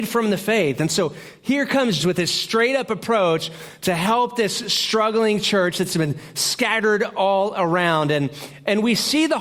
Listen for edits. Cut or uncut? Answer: cut